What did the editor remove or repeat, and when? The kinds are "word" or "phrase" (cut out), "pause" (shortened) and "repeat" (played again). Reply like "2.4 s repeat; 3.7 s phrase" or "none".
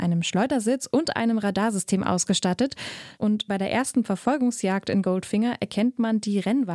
3.5 s word